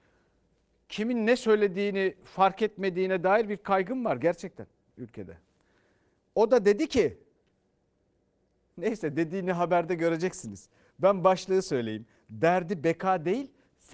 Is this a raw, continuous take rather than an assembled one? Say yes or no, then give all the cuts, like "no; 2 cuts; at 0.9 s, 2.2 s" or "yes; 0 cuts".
yes; 0 cuts